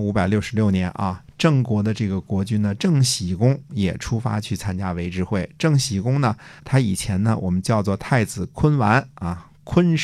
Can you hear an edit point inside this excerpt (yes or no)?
yes